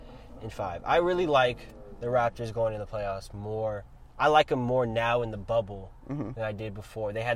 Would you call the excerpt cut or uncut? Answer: uncut